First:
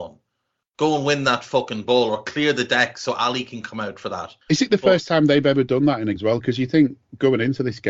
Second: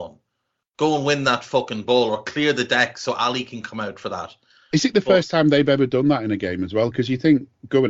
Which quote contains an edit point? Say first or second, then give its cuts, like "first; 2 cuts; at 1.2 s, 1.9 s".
first; 2 cuts; at 4.4 s, 6.2 s